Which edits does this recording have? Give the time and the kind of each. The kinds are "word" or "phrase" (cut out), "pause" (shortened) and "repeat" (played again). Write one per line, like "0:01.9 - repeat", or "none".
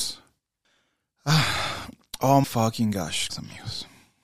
0:02.4 - word
0:03.3 - word